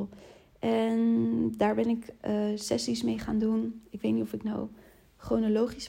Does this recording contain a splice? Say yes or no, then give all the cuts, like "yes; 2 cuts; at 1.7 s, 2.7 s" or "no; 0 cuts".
no; 0 cuts